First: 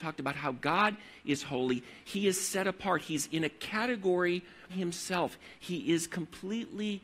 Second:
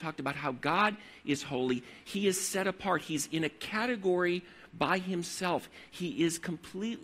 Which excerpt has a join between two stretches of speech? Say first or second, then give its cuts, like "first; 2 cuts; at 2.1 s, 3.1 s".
first; 1 cut; at 4.7 s